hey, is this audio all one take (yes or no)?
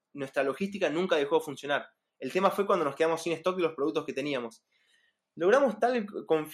yes